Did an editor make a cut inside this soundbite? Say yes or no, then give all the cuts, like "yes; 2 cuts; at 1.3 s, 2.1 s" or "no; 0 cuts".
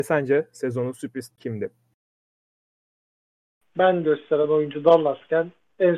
yes; 2 cuts; at 1.3 s, 4.0 s